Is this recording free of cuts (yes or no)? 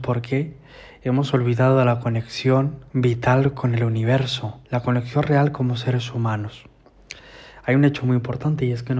no